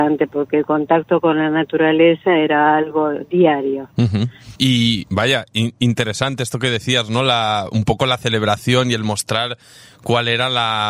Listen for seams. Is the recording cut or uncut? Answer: cut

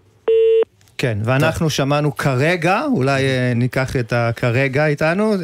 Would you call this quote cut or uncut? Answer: uncut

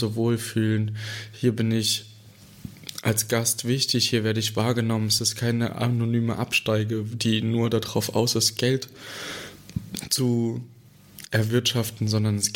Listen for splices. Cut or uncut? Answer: uncut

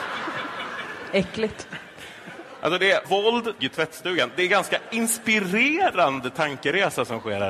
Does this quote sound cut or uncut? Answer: cut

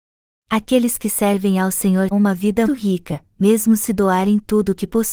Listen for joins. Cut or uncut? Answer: cut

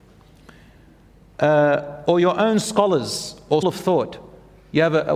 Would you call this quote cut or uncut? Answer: cut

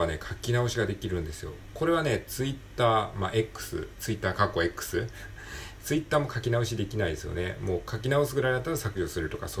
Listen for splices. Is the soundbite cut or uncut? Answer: uncut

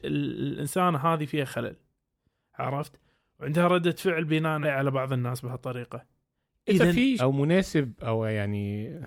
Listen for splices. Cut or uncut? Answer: cut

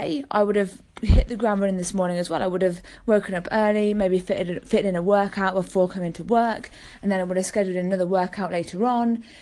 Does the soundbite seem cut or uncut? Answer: uncut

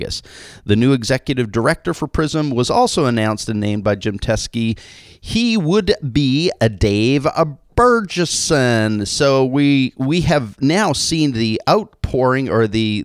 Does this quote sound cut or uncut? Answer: uncut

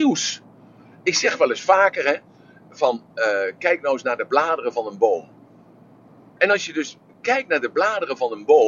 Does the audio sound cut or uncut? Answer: uncut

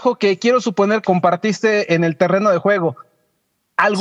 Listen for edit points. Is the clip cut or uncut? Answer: cut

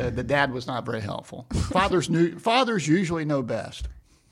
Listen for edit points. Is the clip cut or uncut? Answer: uncut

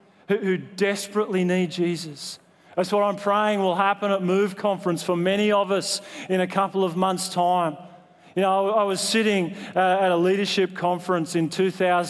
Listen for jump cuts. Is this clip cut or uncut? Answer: uncut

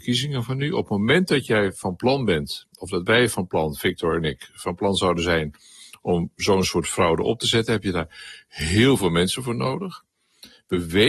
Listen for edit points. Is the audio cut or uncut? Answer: uncut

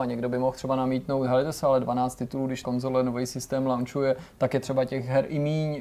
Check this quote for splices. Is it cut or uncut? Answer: cut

